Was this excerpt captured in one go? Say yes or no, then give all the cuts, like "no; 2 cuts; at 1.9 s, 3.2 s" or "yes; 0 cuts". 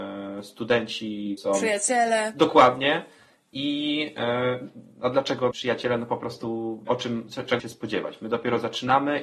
no; 4 cuts; at 1.4 s, 5.5 s, 6.9 s, 7.6 s